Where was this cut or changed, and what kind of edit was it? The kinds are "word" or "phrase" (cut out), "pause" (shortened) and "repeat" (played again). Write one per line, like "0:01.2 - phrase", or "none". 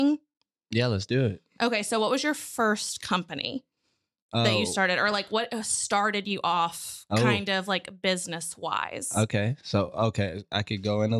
none